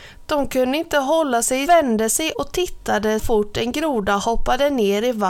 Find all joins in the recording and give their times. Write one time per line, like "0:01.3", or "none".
0:01.6
0:02.3
0:03.2

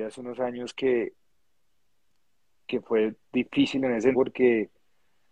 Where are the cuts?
0:04.1

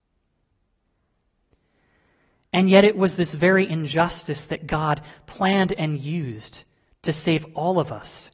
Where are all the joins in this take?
none

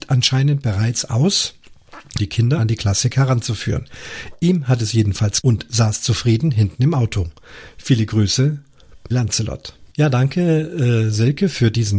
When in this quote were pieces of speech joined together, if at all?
0:02.2
0:02.6
0:05.4
0:09.1
0:09.9

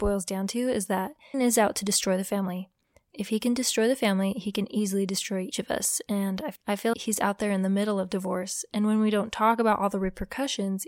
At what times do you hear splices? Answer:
0:01.3
0:05.5
0:06.9

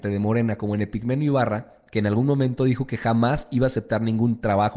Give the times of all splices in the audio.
none

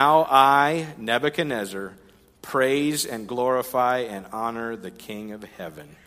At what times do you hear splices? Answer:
none

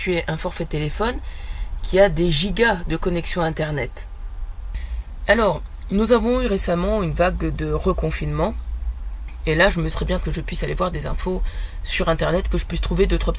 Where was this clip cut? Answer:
0:09.9
0:10.2

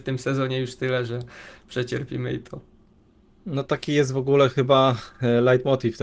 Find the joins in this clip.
none

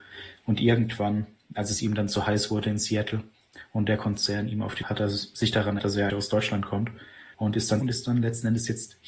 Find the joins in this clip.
0:04.8
0:05.8
0:06.1
0:07.3
0:07.8

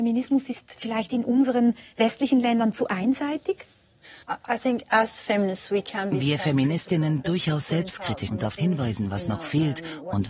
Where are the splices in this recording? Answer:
0:04.2
0:07.2
0:08.3
0:08.6

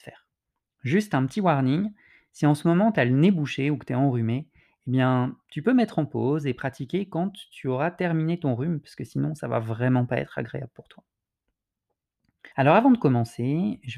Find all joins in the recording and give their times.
0:12.5

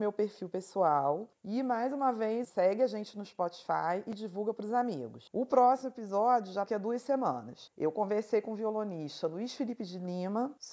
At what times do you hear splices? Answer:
0:02.4
0:06.7

